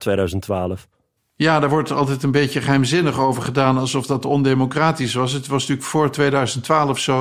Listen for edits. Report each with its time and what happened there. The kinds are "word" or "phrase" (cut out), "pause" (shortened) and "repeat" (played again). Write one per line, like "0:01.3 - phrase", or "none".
0:01.2 - pause